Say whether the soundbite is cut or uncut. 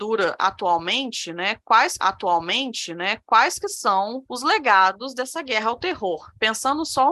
cut